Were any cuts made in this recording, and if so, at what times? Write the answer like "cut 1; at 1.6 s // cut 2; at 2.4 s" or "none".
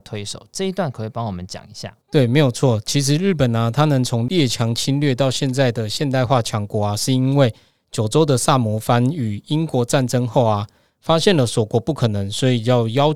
cut 1; at 2.0 s